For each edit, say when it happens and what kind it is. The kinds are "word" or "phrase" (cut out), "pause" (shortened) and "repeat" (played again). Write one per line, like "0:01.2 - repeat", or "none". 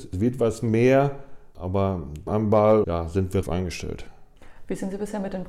0:02.3 - phrase
0:02.8 - word
0:03.4 - phrase